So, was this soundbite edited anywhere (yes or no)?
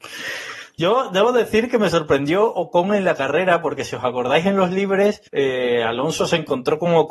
yes